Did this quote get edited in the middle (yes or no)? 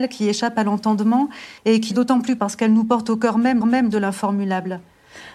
yes